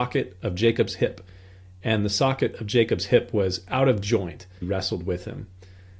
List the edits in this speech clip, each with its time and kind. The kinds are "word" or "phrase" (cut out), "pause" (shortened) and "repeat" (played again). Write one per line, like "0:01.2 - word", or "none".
0:04.6 - phrase